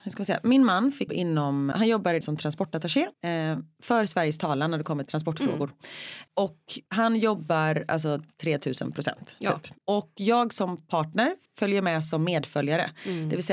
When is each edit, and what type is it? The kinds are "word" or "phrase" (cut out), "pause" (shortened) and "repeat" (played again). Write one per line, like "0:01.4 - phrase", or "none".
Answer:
0:01.1 - word
0:01.7 - word
0:02.2 - phrase
0:03.1 - pause
0:05.1 - word
0:06.9 - pause
0:09.8 - pause
0:11.5 - pause